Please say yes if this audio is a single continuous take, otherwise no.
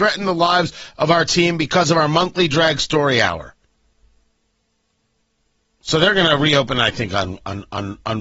yes